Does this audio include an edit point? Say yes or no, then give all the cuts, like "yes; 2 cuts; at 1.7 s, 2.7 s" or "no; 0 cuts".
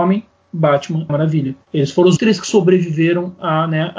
yes; 3 cuts; at 1.1 s, 1.6 s, 2.2 s